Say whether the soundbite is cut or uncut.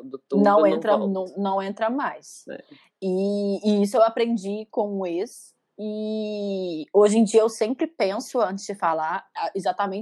uncut